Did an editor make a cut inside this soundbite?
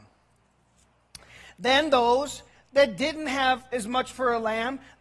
yes; 1 cut; at 4.1 s

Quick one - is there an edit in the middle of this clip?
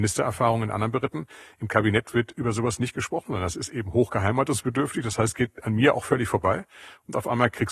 no; 0 cuts

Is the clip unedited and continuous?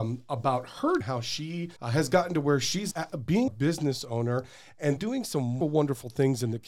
no; 6 cuts; at 1.0 s, 1.8 s, 2.9 s, 3.5 s, 5.0 s, 5.6 s

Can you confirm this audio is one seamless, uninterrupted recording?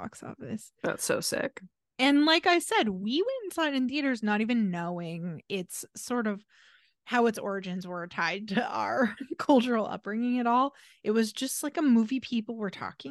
yes; 0 cuts

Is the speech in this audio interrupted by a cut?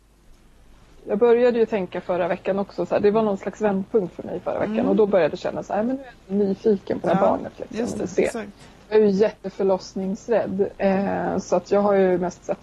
no; 0 cuts

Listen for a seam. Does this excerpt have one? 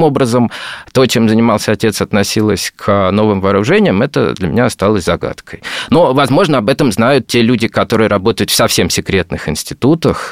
no; 0 cuts

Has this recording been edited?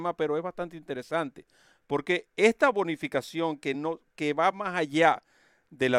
no; 0 cuts

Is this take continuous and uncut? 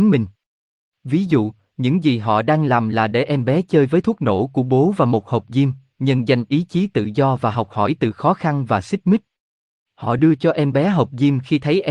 yes; 0 cuts

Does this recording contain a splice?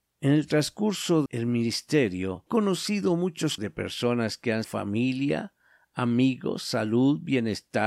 yes; 4 cuts; at 1.3 s, 2.5 s, 3.6 s, 4.6 s

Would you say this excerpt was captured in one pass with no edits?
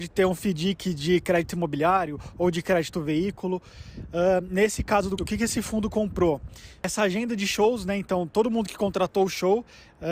no; 1 cut; at 5.2 s

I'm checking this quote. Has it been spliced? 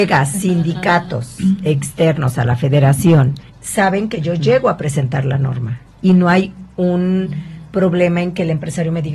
yes; 1 cut; at 3.5 s

